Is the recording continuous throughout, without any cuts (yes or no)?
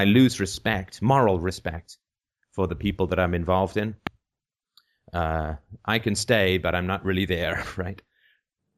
yes